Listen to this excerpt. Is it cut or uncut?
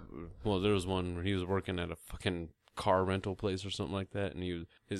uncut